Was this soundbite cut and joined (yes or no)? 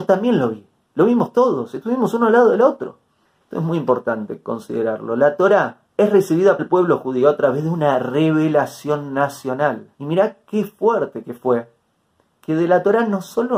yes